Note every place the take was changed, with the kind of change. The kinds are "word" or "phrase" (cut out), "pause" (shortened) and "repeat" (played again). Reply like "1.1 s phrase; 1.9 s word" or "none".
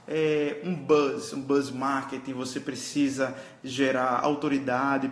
none